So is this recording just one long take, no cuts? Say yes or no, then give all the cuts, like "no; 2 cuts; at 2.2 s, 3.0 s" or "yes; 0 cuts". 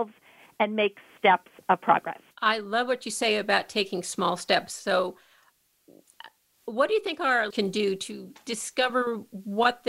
no; 3 cuts; at 1.2 s, 2.3 s, 7.5 s